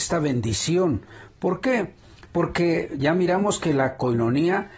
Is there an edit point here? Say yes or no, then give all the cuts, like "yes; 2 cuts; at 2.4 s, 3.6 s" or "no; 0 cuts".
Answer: no; 0 cuts